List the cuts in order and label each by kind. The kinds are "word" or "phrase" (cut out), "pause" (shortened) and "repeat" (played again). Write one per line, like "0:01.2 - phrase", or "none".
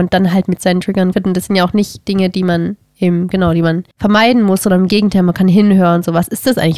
0:01.1 - word
0:03.9 - pause